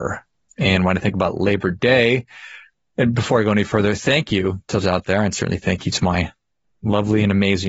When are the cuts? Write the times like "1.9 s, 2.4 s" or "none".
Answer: 4.8 s